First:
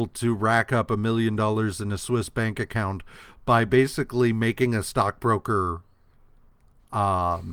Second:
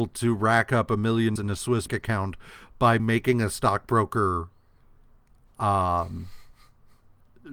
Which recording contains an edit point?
second; 3 cuts; at 1.4 s, 1.9 s, 3.0 s

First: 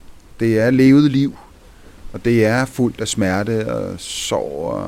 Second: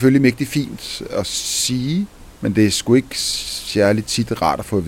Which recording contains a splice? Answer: second; 1 cut; at 2.4 s

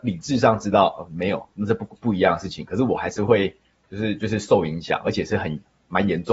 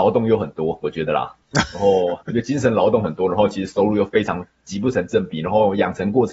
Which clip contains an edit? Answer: second; 2 cuts; at 1.4 s, 2.2 s

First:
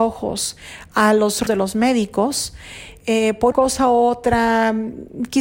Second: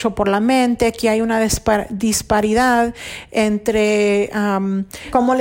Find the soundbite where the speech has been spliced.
first; 2 cuts; at 1.5 s, 3.5 s

